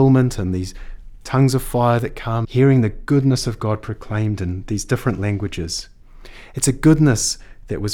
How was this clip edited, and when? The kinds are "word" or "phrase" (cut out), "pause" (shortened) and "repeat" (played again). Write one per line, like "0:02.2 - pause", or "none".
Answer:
0:02.4 - word